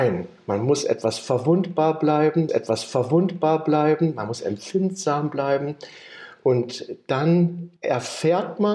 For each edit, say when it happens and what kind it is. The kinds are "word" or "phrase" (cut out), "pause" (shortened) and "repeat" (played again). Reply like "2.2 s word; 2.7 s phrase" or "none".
2.5 s repeat; 7.8 s pause